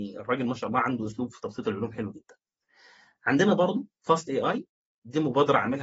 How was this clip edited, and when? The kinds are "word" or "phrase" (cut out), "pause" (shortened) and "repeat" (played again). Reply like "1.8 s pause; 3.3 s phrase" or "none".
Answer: none